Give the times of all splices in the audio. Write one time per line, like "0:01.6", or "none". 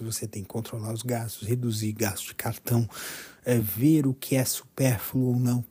none